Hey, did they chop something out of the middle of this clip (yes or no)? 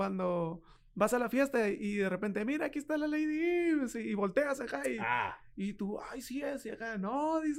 no